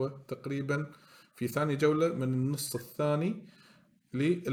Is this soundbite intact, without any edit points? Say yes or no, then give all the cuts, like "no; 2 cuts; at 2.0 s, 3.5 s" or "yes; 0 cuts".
yes; 0 cuts